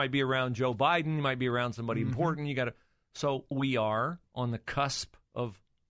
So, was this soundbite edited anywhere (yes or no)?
yes